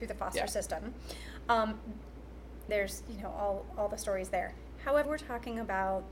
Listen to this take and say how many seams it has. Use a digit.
2